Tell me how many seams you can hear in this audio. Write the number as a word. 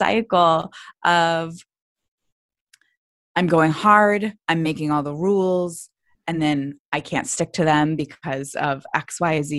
zero